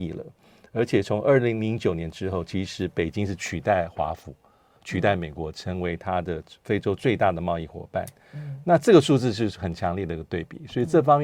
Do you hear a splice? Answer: no; 0 cuts

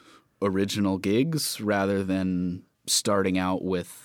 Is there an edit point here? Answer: no; 0 cuts

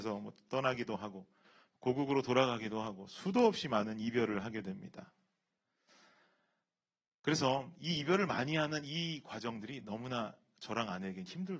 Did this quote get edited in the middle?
no; 0 cuts

